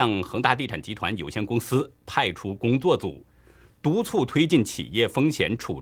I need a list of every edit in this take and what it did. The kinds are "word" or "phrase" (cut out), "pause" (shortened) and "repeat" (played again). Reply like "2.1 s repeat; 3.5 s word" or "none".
none